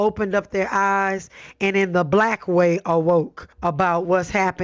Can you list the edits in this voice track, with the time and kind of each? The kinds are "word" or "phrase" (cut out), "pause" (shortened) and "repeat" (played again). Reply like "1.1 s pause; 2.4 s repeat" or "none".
3.5 s pause